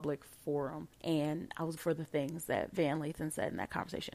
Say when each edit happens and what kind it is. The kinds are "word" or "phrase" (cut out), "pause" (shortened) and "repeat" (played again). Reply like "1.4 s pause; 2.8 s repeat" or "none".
0.9 s pause; 1.8 s word